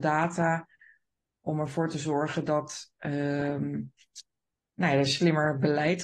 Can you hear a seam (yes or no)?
no